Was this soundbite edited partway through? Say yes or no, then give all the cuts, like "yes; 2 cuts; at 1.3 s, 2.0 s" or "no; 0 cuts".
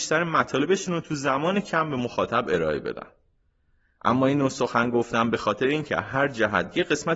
no; 0 cuts